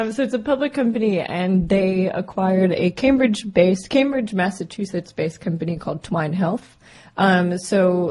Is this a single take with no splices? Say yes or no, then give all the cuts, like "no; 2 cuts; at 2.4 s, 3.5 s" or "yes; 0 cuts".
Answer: yes; 0 cuts